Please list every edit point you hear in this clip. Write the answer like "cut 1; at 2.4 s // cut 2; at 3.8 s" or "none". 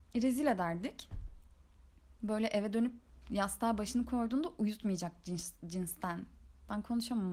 none